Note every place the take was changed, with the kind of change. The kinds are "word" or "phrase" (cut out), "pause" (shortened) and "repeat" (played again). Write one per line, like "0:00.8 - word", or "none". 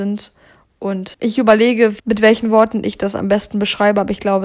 0:01.1 - word
0:02.0 - word

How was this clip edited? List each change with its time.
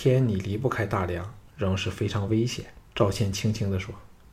0:01.5 - pause
0:02.9 - pause

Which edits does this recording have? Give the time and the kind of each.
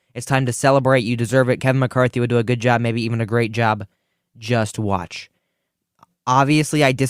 none

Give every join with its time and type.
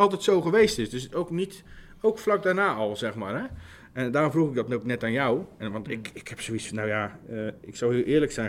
none

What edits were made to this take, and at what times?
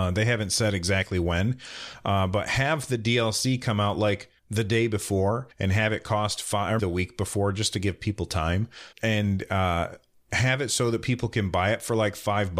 0:04.4 - pause
0:05.5 - pause
0:06.8 - word
0:08.9 - word

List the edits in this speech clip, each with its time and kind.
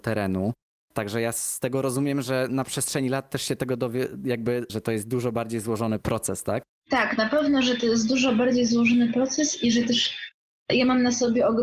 0:04.7 - phrase
0:06.0 - word

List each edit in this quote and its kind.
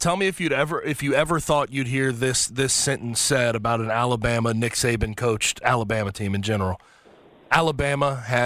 none

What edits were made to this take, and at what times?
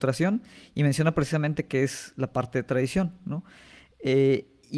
none

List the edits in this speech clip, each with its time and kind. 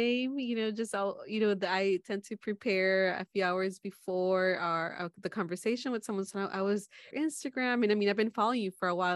0:07.1 - phrase

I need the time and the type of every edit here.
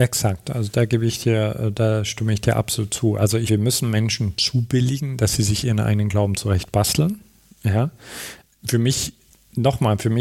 0:03.5 - phrase

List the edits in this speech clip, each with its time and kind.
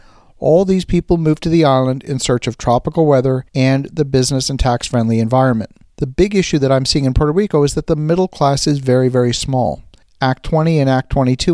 0:03.5 - pause
0:05.9 - pause
0:10.0 - pause

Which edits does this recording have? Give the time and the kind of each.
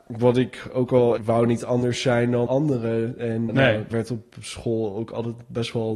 0:01.2 - word
0:02.5 - word
0:03.5 - word
0:03.9 - word

